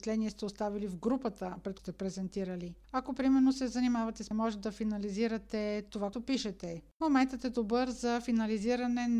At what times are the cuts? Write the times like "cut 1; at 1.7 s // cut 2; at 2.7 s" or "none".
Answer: cut 1; at 1.8 s // cut 2; at 4.3 s // cut 3; at 6.1 s